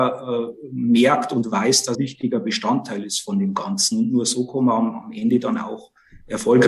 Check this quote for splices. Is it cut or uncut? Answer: cut